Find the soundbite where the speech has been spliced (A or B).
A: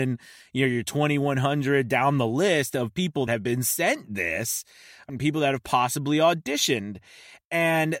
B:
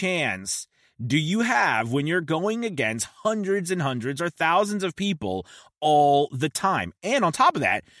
A